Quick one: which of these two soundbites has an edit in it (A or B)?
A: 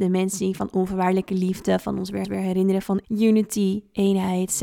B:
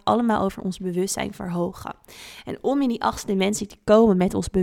A